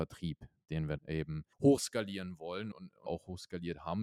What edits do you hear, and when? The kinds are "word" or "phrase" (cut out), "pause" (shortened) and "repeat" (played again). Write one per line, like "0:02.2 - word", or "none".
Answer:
0:01.0 - word
0:01.5 - pause
0:02.7 - word
0:03.1 - word